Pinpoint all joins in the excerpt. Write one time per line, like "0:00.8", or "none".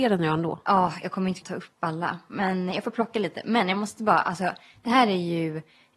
0:01.4